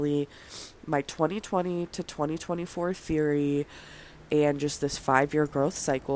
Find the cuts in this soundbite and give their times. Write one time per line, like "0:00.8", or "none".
none